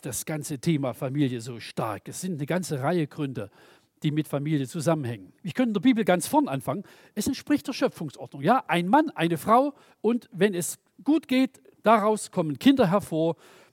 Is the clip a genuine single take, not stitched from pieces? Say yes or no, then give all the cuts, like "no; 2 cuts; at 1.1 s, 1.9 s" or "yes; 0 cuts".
no; 1 cut; at 5.4 s